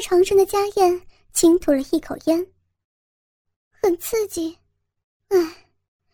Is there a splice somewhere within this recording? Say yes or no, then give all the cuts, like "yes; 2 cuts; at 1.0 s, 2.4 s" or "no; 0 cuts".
no; 0 cuts